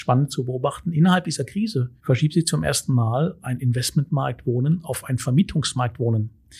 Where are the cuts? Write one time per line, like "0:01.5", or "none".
0:02.0